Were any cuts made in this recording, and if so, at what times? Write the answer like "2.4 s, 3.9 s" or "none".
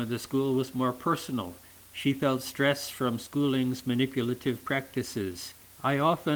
none